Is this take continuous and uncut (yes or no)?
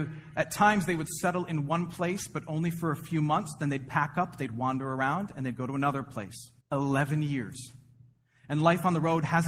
no